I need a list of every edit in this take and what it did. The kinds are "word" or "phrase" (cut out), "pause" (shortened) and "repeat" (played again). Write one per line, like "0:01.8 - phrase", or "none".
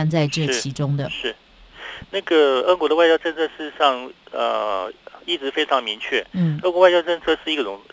none